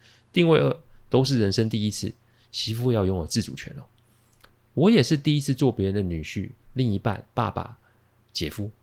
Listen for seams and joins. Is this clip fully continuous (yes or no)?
yes